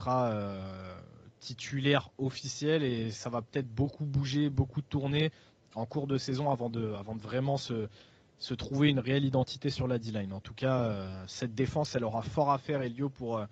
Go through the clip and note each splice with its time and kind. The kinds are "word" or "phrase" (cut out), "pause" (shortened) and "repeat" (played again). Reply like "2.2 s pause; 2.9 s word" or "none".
none